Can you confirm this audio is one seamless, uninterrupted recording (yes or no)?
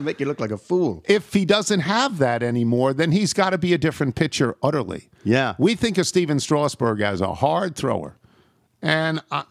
yes